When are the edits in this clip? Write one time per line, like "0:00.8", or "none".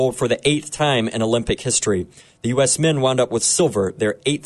none